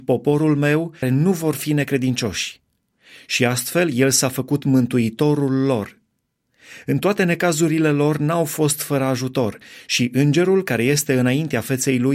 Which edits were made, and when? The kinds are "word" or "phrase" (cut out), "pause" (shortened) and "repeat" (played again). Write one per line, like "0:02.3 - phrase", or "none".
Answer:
0:01.0 - phrase